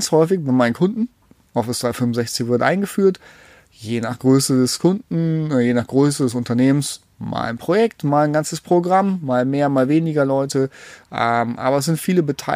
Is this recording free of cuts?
yes; 0 cuts

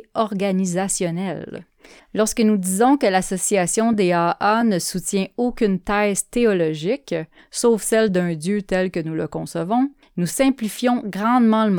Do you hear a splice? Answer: no; 0 cuts

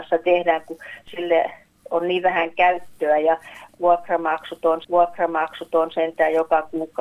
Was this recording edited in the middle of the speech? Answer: yes; 1 cut; at 4.8 s

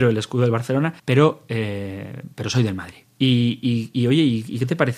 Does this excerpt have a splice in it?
yes; 1 cut; at 1.0 s

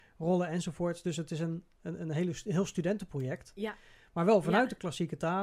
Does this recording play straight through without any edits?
yes; 0 cuts

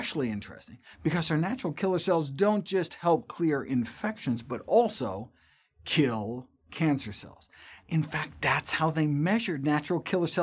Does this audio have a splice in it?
no; 0 cuts

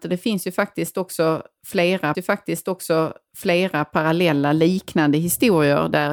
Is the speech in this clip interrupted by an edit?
yes; 1 cut; at 2.1 s

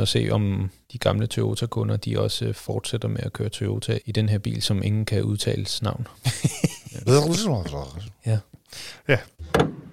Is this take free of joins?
no; 1 cut; at 4.0 s

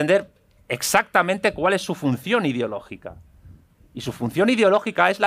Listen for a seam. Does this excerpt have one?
no; 0 cuts

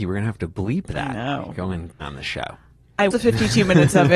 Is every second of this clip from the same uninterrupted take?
no; 2 cuts; at 2.0 s, 3.1 s

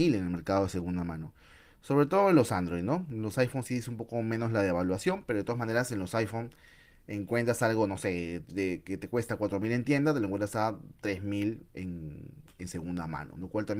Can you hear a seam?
no; 0 cuts

